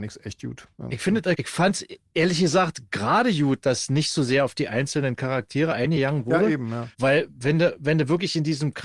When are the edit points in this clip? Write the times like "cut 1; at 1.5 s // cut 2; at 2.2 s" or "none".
cut 1; at 1.3 s // cut 2; at 6.9 s

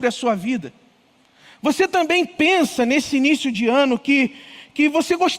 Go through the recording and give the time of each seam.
none

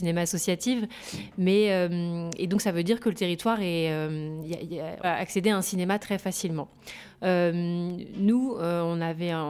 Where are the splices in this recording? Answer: cut 1; at 5.0 s

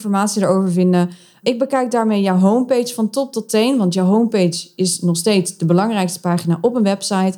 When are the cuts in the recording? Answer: none

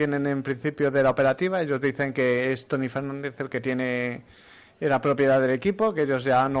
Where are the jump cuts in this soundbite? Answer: none

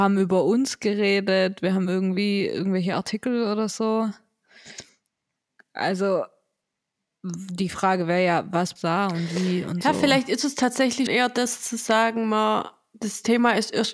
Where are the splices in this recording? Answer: cut 1; at 8.8 s // cut 2; at 11.1 s

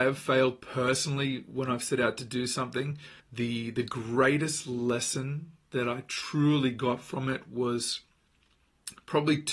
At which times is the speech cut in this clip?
cut 1; at 3.2 s

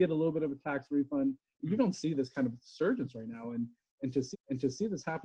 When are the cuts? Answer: cut 1; at 1.8 s // cut 2; at 4.3 s

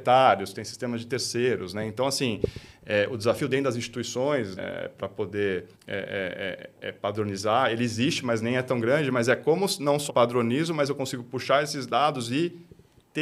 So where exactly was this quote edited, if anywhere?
cut 1; at 4.6 s // cut 2; at 5.7 s // cut 3; at 10.1 s

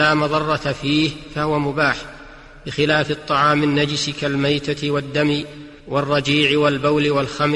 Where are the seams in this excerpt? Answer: cut 1; at 5.8 s

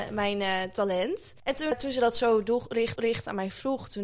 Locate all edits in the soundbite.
cut 1; at 1.4 s // cut 2; at 1.7 s // cut 3; at 3.0 s

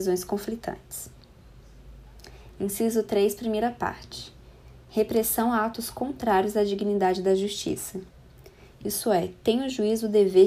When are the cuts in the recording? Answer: none

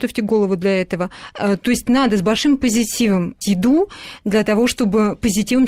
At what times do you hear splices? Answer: cut 1; at 3.4 s

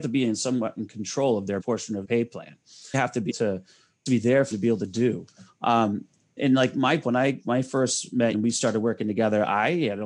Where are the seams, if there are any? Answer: cut 1; at 1.6 s // cut 2; at 2.0 s // cut 3; at 2.9 s // cut 4; at 3.3 s // cut 5; at 4.1 s // cut 6; at 4.5 s // cut 7; at 6.4 s // cut 8; at 7.0 s // cut 9; at 8.3 s

